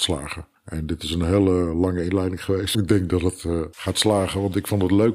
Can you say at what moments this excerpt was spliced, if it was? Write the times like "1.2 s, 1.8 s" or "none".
2.7 s